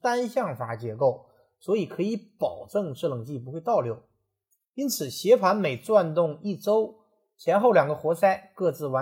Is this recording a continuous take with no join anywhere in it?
yes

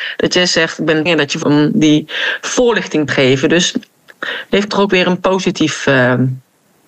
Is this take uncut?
no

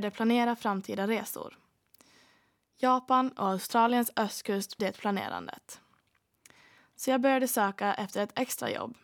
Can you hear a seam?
yes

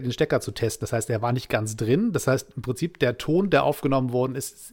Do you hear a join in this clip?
no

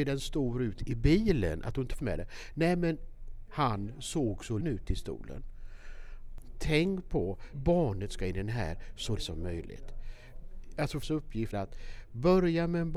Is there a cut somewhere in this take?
yes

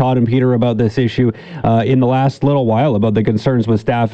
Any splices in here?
no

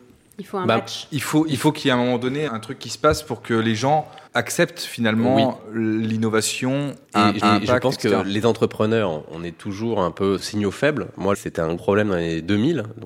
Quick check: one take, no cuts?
no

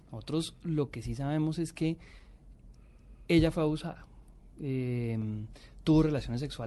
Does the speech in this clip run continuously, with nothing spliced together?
yes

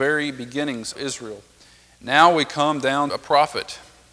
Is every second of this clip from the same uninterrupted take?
no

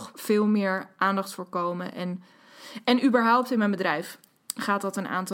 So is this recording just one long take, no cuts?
yes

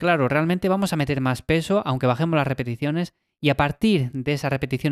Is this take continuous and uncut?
yes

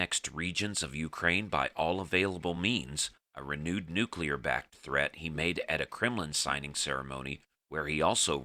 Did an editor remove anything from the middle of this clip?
no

